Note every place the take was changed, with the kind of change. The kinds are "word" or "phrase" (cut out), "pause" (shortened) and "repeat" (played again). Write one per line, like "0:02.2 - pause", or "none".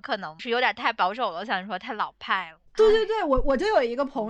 0:02.7 - pause

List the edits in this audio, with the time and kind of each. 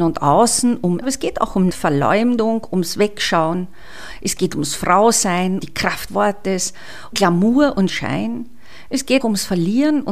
0:01.0 - word
0:01.7 - word
0:05.6 - word
0:06.1 - word
0:07.1 - word
0:07.9 - word
0:09.2 - word

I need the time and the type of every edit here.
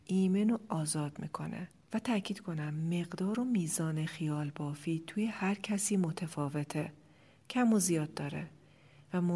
none

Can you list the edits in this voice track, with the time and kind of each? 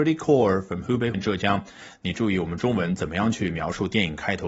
0:01.1 - word

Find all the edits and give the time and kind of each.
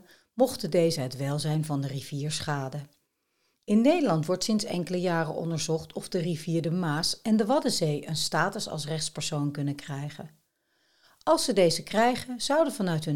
none

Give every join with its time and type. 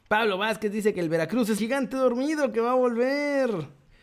0:01.6 - word

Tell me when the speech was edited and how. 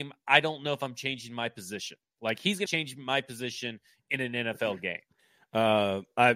0:02.7 - phrase

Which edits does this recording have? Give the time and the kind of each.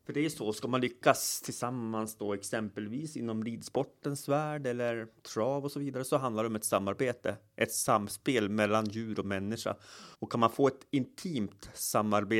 0:10.1 - pause

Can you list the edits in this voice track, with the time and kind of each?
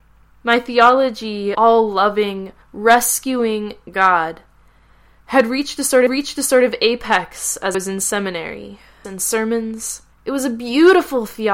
0:01.5 - phrase
0:02.6 - pause
0:06.1 - repeat
0:07.7 - word
0:09.0 - phrase
0:10.1 - pause

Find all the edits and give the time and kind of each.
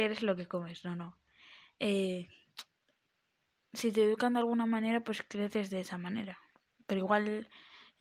none

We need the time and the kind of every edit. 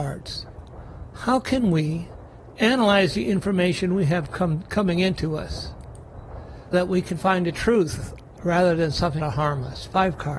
0:06.7 - word
0:09.2 - word

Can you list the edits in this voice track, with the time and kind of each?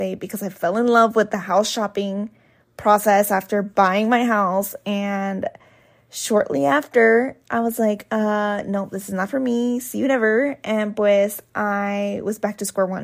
none

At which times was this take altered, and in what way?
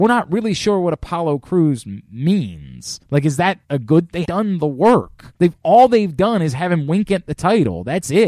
0:01.4 - phrase
0:03.0 - pause
0:03.6 - pause
0:04.3 - word
0:05.4 - pause

